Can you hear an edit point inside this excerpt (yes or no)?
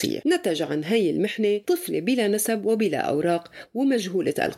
no